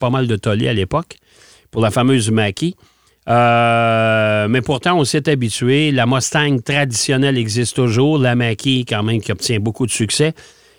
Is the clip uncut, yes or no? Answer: yes